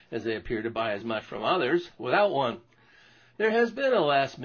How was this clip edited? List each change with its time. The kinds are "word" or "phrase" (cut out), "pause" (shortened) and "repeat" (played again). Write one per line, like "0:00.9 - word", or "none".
none